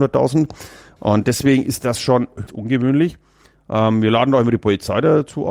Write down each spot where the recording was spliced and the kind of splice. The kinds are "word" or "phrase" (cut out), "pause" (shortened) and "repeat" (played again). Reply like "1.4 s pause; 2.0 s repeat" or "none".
2.5 s phrase